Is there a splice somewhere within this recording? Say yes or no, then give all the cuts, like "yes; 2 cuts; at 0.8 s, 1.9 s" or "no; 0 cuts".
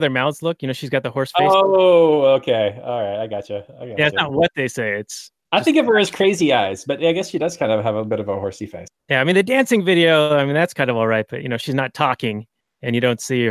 no; 0 cuts